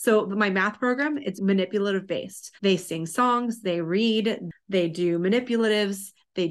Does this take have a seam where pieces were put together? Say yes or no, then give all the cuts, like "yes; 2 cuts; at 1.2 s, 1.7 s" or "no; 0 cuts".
yes; 2 cuts; at 1.4 s, 2.6 s